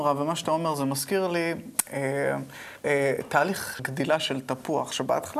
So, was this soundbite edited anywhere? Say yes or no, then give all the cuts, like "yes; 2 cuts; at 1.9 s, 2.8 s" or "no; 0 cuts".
yes; 2 cuts; at 2.8 s, 3.8 s